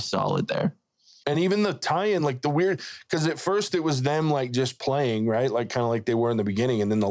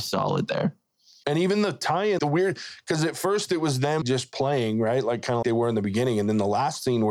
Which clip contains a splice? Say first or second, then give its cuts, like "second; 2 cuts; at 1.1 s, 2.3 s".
second; 3 cuts; at 2.2 s, 4.0 s, 5.4 s